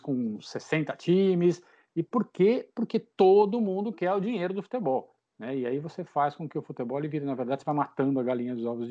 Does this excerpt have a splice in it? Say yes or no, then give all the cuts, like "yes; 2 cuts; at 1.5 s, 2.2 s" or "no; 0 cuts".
no; 0 cuts